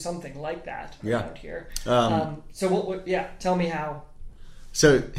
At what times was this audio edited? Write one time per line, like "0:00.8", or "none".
none